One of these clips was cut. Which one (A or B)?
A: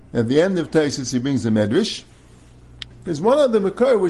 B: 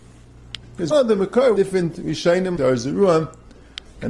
B